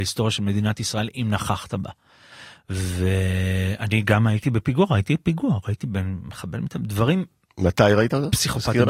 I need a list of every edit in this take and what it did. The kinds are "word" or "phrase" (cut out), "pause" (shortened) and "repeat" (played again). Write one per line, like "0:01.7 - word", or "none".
none